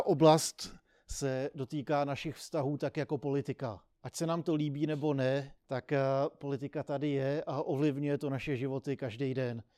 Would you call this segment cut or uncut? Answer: cut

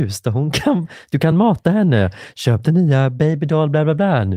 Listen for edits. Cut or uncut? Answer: uncut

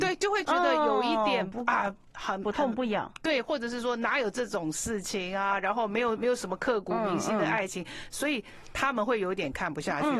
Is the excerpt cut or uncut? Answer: uncut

